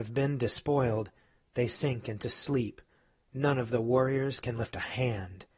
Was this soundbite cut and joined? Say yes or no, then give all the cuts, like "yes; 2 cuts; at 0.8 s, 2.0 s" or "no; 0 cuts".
no; 0 cuts